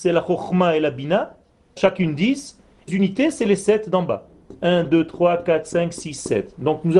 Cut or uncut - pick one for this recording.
cut